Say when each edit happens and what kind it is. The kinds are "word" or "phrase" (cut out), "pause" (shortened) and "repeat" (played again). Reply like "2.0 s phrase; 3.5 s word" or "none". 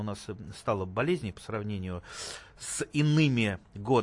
none